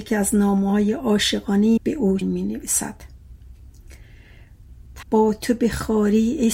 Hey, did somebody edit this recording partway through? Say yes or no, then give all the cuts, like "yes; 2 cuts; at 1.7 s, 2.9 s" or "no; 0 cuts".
yes; 3 cuts; at 1.8 s, 2.2 s, 5.0 s